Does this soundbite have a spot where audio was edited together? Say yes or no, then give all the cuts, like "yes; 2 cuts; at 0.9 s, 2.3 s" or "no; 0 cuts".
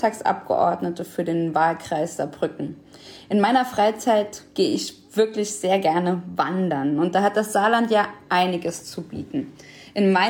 no; 0 cuts